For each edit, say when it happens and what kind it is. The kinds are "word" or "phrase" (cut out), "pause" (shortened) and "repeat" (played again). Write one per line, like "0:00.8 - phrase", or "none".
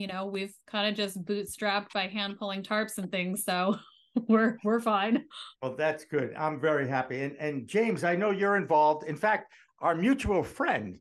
0:05.6 - pause